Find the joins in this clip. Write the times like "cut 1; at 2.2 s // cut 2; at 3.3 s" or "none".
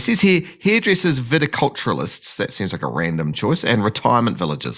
none

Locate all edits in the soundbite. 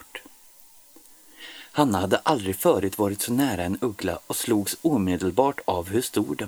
none

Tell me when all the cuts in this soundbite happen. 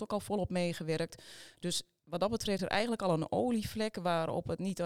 cut 1; at 2.6 s

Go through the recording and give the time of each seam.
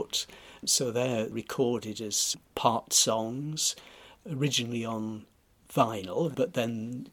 cut 1; at 2.4 s

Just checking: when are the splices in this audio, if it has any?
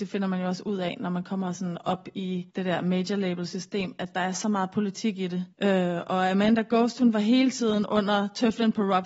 cut 1; at 2.5 s // cut 2; at 5.5 s

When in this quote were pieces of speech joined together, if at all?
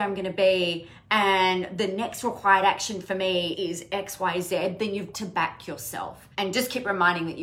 cut 1; at 3.5 s // cut 2; at 5.1 s // cut 3; at 6.3 s

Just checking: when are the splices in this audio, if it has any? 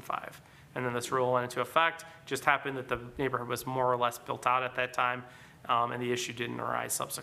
none

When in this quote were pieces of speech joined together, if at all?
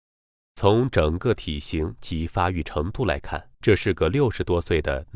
cut 1; at 3.5 s

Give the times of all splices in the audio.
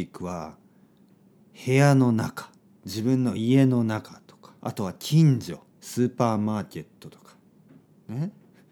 cut 1; at 2.6 s // cut 2; at 4.6 s // cut 3; at 5.7 s

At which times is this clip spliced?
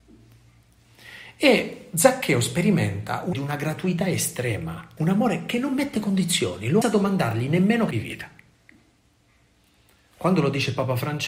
cut 1; at 3.3 s // cut 2; at 5.0 s // cut 3; at 6.8 s // cut 4; at 7.9 s

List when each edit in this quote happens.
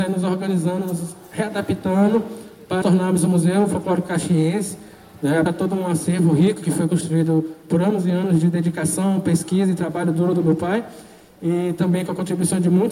cut 1; at 2.8 s // cut 2; at 5.5 s

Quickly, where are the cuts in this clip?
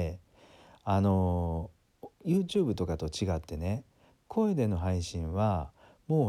cut 1; at 2.1 s

